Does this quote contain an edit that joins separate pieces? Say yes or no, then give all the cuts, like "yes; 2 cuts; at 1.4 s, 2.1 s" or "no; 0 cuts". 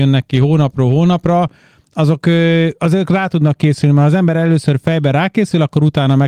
no; 0 cuts